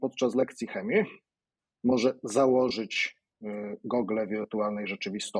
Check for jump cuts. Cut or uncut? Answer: uncut